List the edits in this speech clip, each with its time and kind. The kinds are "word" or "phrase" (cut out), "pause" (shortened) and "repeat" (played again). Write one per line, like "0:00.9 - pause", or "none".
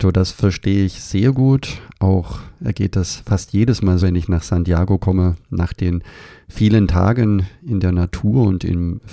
0:02.6 - word
0:04.0 - word